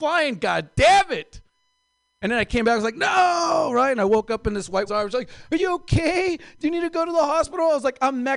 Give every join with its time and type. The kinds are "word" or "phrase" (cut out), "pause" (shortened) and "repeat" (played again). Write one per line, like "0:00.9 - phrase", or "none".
0:04.9 - word